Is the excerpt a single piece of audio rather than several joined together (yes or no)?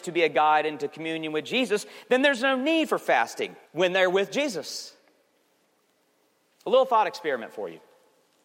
no